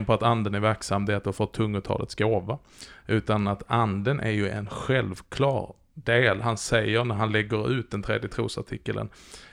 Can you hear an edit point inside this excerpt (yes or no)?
no